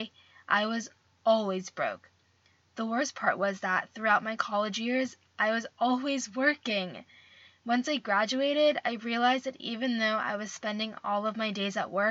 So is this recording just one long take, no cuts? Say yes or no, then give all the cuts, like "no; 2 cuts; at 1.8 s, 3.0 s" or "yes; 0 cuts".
yes; 0 cuts